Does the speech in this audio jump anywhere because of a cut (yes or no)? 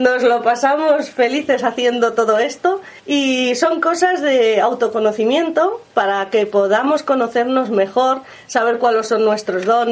yes